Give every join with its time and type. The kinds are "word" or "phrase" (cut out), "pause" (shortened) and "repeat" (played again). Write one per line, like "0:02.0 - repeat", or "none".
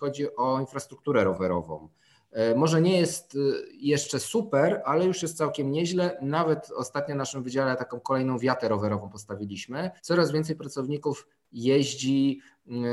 0:10.0 - pause